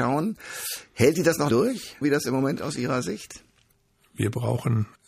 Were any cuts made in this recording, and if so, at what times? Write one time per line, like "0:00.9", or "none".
0:01.5
0:02.0
0:02.6

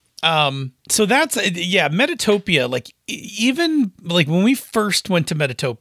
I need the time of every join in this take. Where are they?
0:03.0
0:04.7

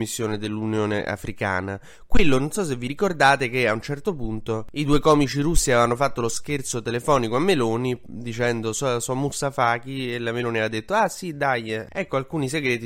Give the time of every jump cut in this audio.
none

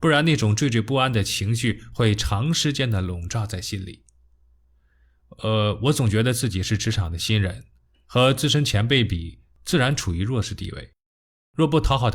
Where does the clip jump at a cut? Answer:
none

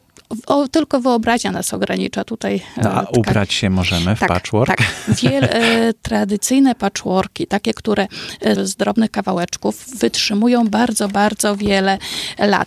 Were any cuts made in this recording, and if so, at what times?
0:08.6

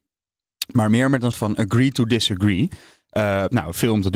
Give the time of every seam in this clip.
0:01.3

